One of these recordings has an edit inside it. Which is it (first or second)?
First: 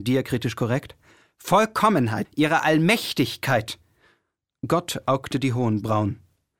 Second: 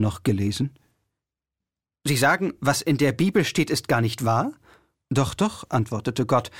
first